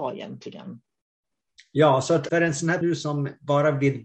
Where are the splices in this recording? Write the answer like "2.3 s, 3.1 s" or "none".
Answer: 2.3 s, 2.8 s